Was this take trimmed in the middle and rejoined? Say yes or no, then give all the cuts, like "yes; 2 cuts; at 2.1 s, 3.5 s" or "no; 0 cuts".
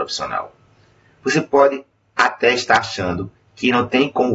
no; 0 cuts